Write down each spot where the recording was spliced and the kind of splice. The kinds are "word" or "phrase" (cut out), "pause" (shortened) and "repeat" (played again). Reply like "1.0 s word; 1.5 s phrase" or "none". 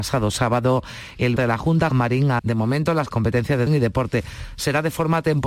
1.4 s word; 1.9 s word; 2.4 s word; 3.1 s word; 3.7 s word